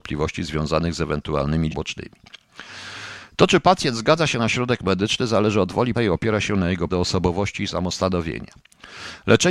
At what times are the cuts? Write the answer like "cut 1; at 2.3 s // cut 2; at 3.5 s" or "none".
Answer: cut 1; at 1.7 s // cut 2; at 5.9 s // cut 3; at 6.9 s